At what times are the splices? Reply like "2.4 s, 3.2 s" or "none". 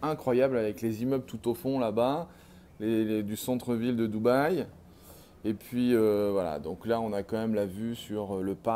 none